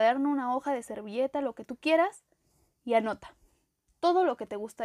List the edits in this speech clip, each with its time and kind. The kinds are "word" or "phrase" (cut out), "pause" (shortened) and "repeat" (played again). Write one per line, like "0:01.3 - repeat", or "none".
none